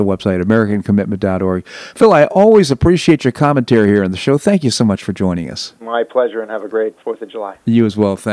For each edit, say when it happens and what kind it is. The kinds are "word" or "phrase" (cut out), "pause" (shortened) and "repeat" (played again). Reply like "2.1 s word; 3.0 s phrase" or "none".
5.8 s pause; 7.0 s word